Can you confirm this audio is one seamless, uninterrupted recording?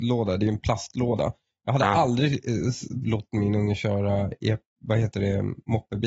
yes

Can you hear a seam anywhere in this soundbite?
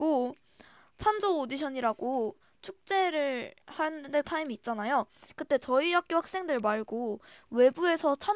yes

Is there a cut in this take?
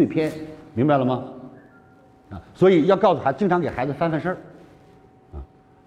no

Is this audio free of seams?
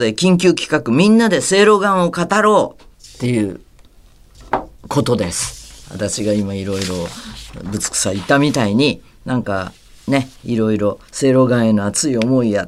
no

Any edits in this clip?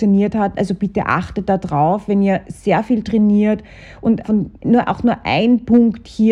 yes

